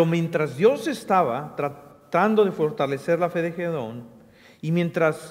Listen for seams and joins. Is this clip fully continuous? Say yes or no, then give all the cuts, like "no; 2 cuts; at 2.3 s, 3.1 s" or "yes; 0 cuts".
yes; 0 cuts